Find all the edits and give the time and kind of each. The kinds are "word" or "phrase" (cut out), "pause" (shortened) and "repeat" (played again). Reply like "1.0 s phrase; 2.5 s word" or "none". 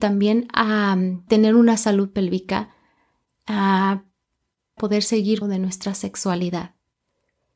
1.3 s word; 4.8 s word; 5.4 s word